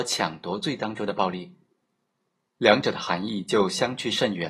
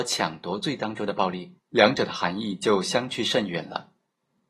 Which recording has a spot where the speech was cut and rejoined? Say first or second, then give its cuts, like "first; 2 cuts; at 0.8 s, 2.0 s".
second; 1 cut; at 1.6 s